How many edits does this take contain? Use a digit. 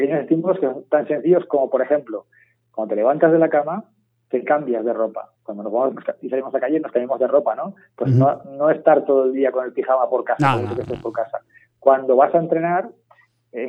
2